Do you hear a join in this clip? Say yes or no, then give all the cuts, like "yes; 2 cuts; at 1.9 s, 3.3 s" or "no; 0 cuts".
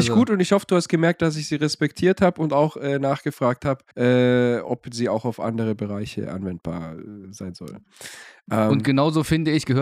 yes; 1 cut; at 3.9 s